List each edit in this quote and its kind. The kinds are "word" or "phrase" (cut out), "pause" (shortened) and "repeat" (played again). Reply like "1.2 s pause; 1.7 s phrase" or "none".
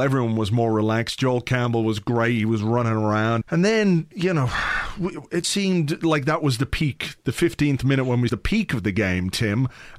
3.4 s word; 5.4 s word; 8.3 s phrase

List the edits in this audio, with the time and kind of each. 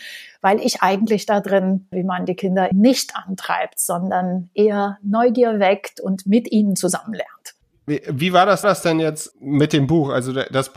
1.9 s word; 2.7 s word; 7.6 s pause; 8.6 s repeat; 9.3 s word

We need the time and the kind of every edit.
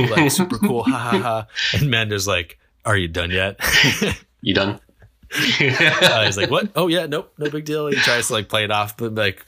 none

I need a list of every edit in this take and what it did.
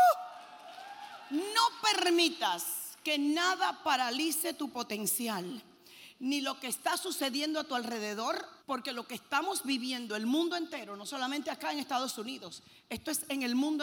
8.6 s pause

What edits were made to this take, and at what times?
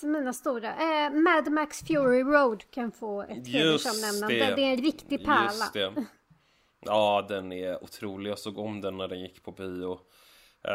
none

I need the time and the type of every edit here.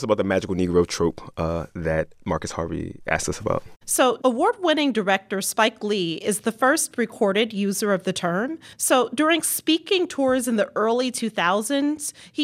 2.2 s pause; 8.7 s pause

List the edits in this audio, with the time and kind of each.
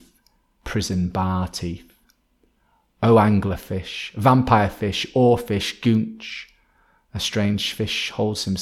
none

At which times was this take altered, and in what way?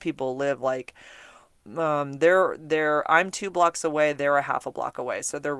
none

